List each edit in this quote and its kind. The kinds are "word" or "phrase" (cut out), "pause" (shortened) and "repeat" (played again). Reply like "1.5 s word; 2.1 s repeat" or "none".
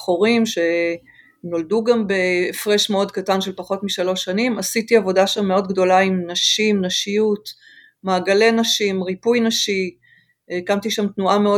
none